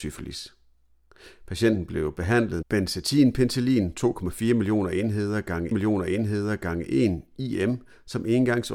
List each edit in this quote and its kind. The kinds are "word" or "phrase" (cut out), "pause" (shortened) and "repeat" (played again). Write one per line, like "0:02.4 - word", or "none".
0:02.6 - word
0:05.7 - repeat

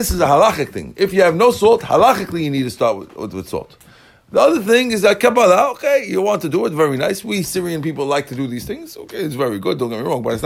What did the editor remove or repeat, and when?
none

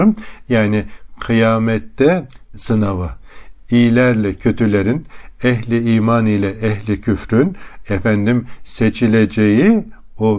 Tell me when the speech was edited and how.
0:02.5 - word

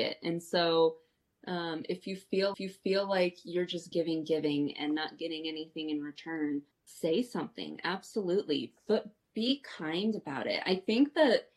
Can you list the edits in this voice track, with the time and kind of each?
0:02.5 - repeat
0:03.9 - word
0:06.7 - pause

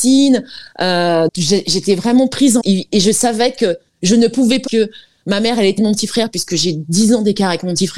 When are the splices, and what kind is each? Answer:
0:01.3 - word
0:02.6 - word
0:03.9 - pause
0:04.7 - phrase
0:05.8 - phrase

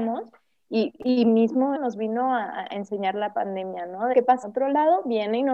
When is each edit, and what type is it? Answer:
0:01.7 - word
0:04.1 - word
0:04.4 - word

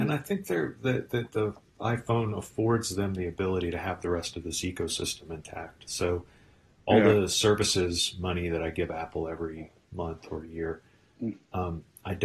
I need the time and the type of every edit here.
none

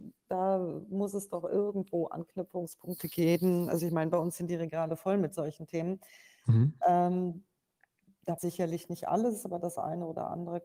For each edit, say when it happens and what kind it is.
0:08.4 - word

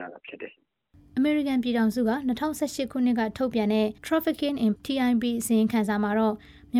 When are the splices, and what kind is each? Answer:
0:04.0 - pause
0:04.8 - word

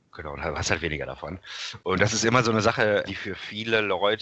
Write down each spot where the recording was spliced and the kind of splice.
0:03.0 - word

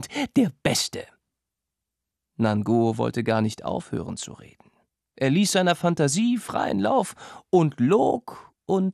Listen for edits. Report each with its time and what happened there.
none

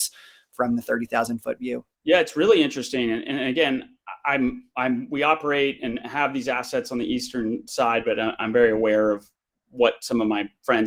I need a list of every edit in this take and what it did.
0:01.9 - pause

